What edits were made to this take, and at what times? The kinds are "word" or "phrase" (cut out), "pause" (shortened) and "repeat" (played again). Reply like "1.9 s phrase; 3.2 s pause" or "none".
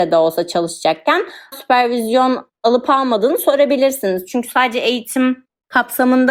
1.5 s word

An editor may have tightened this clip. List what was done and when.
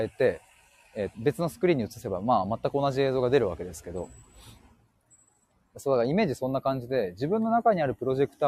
1.1 s word

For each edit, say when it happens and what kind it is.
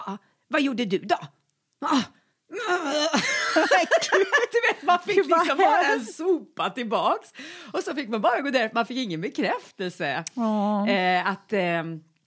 none

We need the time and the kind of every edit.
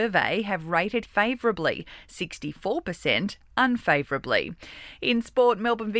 1.0 s word

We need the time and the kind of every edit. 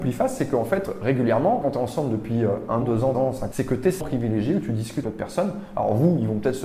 1.6 s word; 2.8 s word; 3.1 s word; 3.5 s word; 4.0 s word; 5.0 s word

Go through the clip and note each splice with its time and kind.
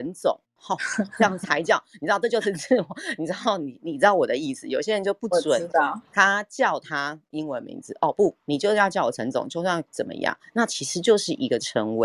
9.9 s pause

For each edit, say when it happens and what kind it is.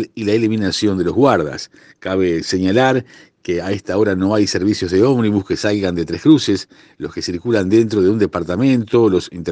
none

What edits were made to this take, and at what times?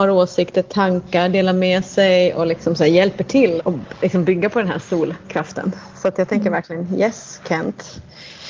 3.6 s word

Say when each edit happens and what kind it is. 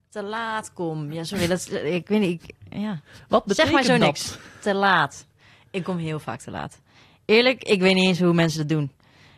none

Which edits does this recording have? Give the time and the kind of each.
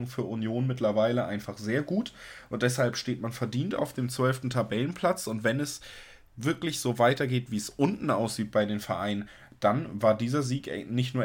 none

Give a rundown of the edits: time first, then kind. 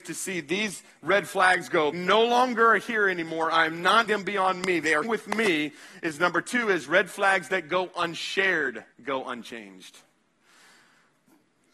1.9 s word; 4.1 s word; 5.0 s word; 8.9 s pause

